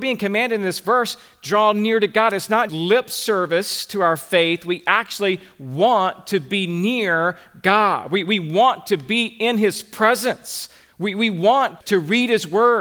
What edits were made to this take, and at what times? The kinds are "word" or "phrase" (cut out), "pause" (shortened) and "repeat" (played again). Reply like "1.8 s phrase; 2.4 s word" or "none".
2.7 s word; 11.8 s word